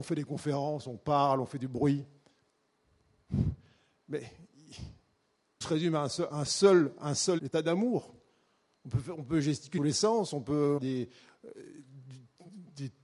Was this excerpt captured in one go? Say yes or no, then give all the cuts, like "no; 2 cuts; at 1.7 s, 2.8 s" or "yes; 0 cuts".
no; 5 cuts; at 5.6 s, 6.3 s, 7.4 s, 9.8 s, 10.8 s